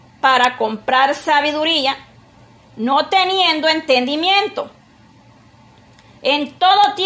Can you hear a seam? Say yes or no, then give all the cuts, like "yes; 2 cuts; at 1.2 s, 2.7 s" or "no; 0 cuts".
no; 0 cuts